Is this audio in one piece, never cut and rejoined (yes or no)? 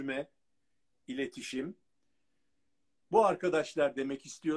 yes